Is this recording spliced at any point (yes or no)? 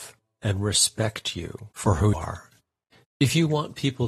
yes